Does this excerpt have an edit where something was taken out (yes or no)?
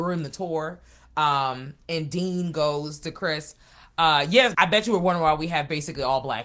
yes